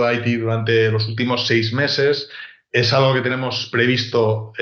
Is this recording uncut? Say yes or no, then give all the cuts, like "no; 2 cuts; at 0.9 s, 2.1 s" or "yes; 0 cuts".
yes; 0 cuts